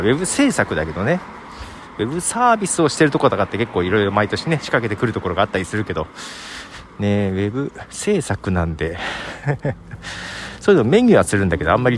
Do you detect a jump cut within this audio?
no; 0 cuts

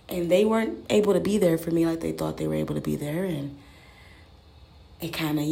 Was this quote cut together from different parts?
no; 0 cuts

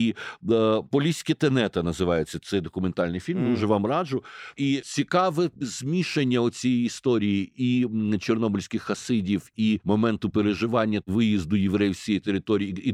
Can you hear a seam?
no; 0 cuts

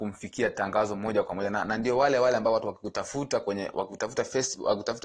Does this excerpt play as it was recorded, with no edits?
yes; 0 cuts

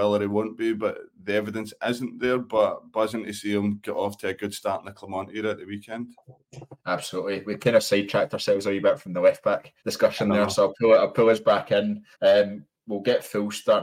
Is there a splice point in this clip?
yes; 3 cuts; at 6.8 s, 9.8 s, 12.1 s

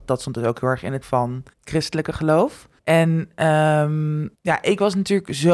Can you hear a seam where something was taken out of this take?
yes; 4 cuts; at 1.0 s, 1.5 s, 2.8 s, 4.3 s

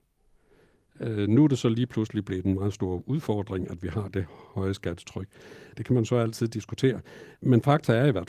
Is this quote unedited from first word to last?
yes; 0 cuts

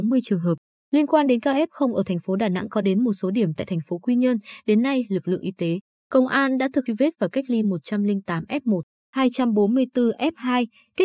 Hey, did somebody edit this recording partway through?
yes; 1 cut; at 6.9 s

